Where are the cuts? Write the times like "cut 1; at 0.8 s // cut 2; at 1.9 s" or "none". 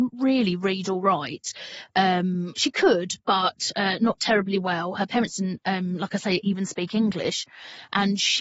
none